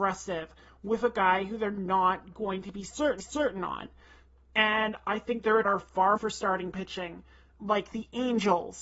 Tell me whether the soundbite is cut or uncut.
cut